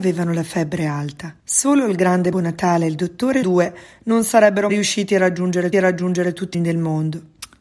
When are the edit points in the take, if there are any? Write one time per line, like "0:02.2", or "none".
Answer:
0:01.4
0:02.3
0:03.4
0:04.7
0:05.7
0:06.5